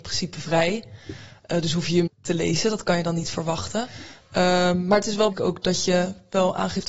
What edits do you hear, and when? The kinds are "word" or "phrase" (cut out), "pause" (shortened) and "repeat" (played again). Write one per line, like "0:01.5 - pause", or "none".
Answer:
0:02.1 - phrase
0:05.3 - phrase